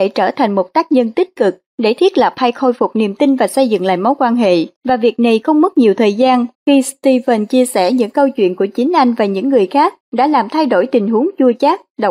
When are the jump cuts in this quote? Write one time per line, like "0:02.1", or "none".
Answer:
0:04.8
0:06.5
0:10.0